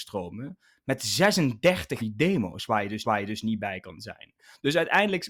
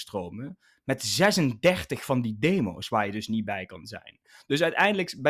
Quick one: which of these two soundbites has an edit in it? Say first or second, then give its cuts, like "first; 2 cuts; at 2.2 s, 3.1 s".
first; 2 cuts; at 2.0 s, 3.0 s